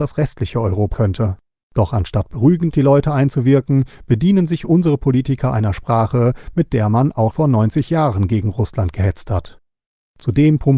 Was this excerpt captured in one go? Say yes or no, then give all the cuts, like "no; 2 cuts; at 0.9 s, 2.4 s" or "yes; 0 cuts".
no; 3 cuts; at 0.9 s, 2.7 s, 7.3 s